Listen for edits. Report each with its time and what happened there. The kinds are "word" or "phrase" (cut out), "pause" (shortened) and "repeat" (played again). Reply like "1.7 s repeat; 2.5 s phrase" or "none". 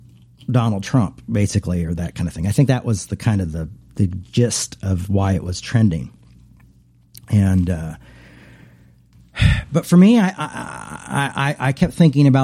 none